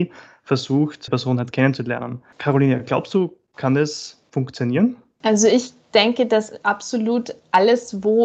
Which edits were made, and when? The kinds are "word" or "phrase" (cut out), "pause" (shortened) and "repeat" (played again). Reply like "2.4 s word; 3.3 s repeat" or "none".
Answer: 1.1 s word